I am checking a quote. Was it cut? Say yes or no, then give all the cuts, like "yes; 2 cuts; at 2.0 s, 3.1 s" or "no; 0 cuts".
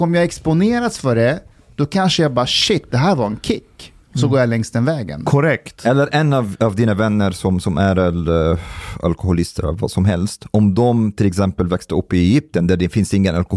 no; 0 cuts